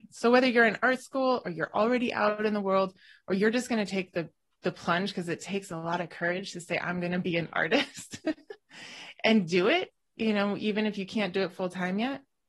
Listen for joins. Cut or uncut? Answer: uncut